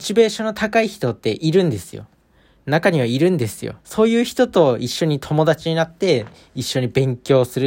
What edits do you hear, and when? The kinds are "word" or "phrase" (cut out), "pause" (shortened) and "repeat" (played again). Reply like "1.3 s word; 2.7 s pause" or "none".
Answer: 3.8 s pause